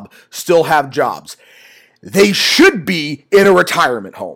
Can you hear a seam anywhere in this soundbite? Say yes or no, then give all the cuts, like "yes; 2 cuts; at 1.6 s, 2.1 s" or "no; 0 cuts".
no; 0 cuts